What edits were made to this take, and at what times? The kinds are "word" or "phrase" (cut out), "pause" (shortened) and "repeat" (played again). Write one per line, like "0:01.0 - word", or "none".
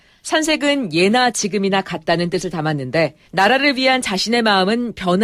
0:03.3 - pause